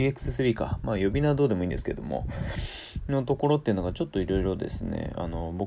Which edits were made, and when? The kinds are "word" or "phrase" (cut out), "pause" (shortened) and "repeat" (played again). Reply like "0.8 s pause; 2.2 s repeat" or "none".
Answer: none

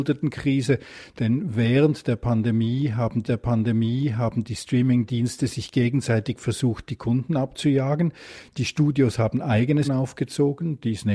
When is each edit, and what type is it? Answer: 3.3 s repeat; 9.8 s word

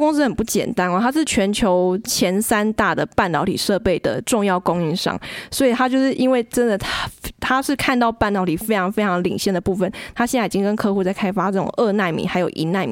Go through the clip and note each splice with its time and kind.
none

